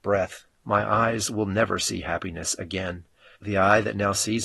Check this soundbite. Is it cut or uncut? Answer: uncut